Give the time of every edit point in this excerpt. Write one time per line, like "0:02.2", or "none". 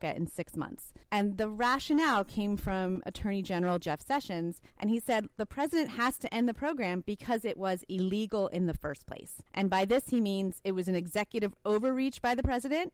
0:01.0
0:04.7
0:09.5

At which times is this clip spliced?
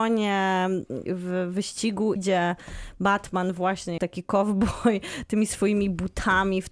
0:01.1
0:02.2
0:04.0

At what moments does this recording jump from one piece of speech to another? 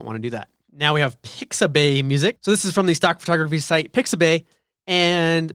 none

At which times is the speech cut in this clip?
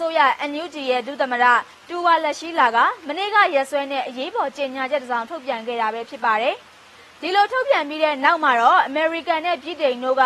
0:06.6

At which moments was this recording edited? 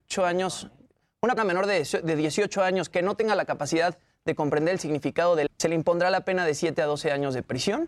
0:01.4
0:02.9
0:05.5

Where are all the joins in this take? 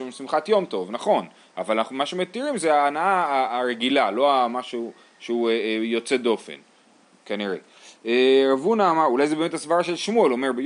none

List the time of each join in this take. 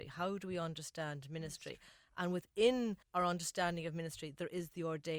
0:03.0

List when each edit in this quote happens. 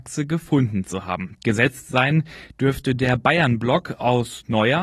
none

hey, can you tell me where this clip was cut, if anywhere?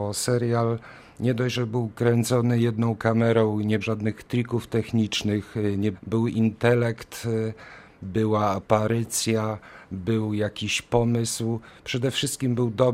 0:03.8
0:05.9

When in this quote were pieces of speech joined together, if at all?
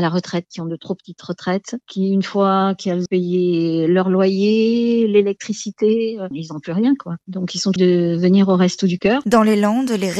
0:03.1
0:07.8

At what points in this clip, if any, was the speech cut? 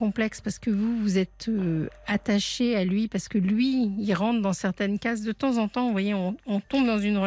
none

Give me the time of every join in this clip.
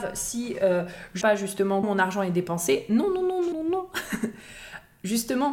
0:01.2
0:01.8
0:03.5

